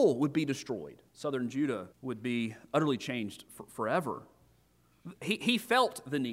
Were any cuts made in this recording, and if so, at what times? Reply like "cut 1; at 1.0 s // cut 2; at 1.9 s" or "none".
cut 1; at 1.1 s // cut 2; at 1.9 s // cut 3; at 5.2 s